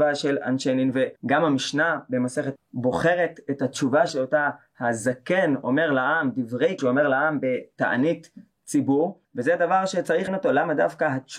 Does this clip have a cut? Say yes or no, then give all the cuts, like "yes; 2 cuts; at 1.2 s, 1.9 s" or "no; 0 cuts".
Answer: yes; 6 cuts; at 1.2 s, 2.6 s, 4.1 s, 6.8 s, 9.2 s, 10.3 s